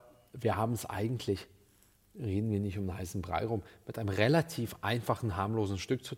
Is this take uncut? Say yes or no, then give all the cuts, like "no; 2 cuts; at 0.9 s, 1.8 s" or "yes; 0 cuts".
yes; 0 cuts